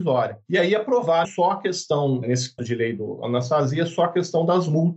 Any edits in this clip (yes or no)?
yes